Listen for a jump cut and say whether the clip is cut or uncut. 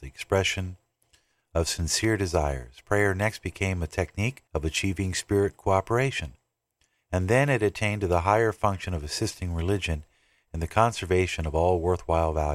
cut